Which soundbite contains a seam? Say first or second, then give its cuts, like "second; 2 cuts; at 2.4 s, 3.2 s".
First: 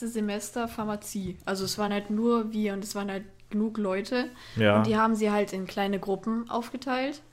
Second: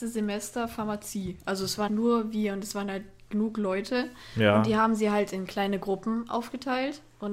second; 1 cut; at 1.9 s